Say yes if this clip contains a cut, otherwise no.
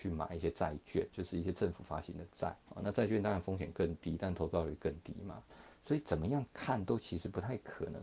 yes